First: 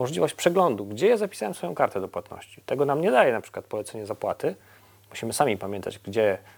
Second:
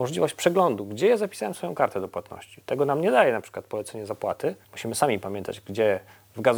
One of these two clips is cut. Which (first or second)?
second